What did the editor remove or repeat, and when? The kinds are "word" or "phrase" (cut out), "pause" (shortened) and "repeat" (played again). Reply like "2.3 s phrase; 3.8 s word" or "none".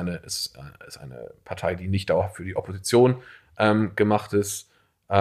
none